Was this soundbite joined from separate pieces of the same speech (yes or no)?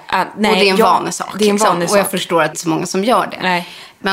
yes